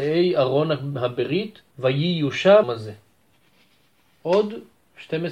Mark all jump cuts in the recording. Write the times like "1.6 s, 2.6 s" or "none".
1.7 s, 2.6 s